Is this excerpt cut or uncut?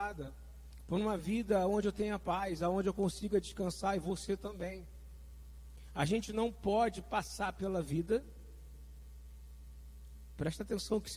uncut